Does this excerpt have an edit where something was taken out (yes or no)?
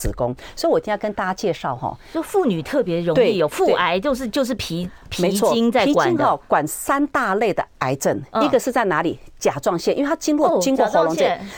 no